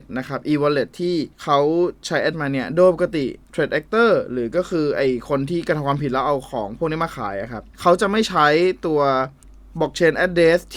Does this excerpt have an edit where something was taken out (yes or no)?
yes